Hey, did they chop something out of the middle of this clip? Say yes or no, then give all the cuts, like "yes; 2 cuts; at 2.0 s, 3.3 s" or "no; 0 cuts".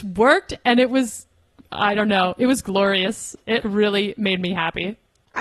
yes; 1 cut; at 3.6 s